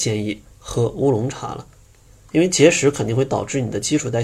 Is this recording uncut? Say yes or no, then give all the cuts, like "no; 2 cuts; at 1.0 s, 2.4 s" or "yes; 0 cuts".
yes; 0 cuts